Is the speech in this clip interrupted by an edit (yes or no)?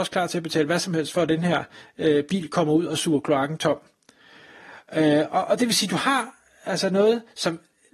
no